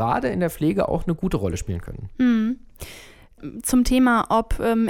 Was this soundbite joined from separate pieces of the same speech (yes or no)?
no